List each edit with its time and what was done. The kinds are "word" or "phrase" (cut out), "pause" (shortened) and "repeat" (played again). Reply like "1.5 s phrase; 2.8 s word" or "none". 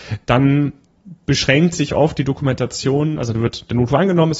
none

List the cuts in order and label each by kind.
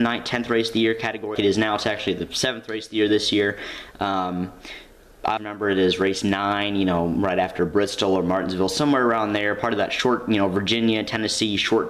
1.3 s word; 5.4 s word

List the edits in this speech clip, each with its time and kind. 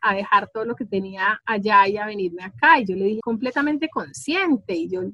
3.2 s phrase

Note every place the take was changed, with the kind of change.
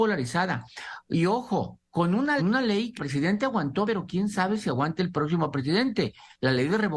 2.4 s phrase; 3.0 s word; 3.9 s word

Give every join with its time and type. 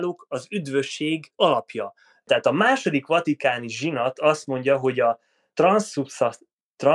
none

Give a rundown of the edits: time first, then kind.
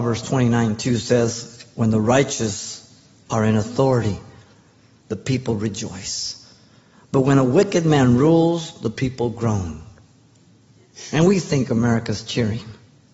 none

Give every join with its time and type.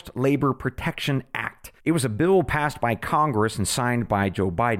1.8 s pause

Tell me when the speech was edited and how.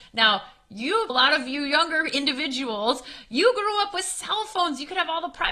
1.1 s word

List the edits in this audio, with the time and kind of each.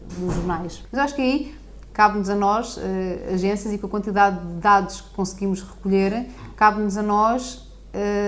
none

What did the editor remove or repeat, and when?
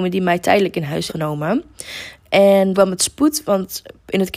1.1 s word; 2.7 s phrase

